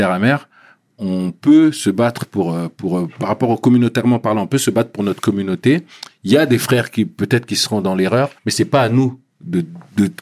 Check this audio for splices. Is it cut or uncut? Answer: cut